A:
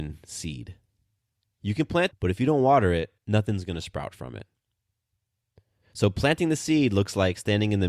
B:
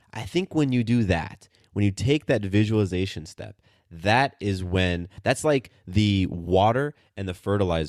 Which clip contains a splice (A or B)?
A